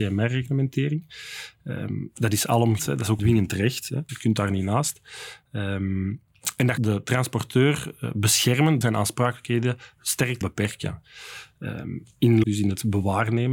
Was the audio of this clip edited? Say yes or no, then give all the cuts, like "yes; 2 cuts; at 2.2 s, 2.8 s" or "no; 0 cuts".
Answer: yes; 7 cuts; at 2.8 s, 3.2 s, 4.1 s, 6.8 s, 8.8 s, 10.4 s, 12.4 s